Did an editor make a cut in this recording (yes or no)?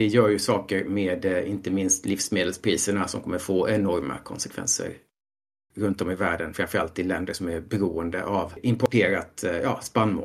no